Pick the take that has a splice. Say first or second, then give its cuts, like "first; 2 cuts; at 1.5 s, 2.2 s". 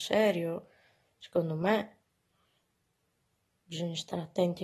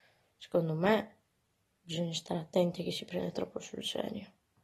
second; 1 cut; at 1.3 s